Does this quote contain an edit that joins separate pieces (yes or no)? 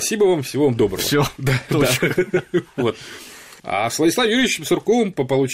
no